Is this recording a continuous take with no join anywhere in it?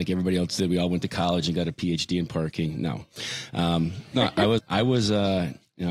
no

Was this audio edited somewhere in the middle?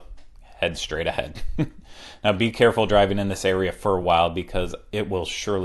no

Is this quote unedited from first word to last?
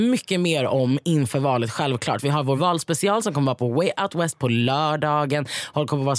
yes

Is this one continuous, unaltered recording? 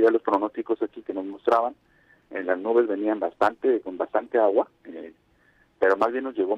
no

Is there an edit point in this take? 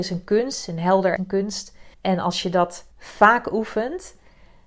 yes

